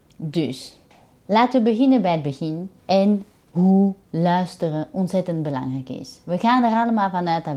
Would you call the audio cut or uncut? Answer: cut